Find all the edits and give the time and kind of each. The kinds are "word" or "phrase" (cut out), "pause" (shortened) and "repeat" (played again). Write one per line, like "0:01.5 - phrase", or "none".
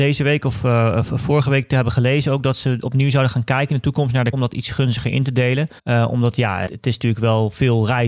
0:04.3 - word
0:05.8 - pause
0:06.7 - word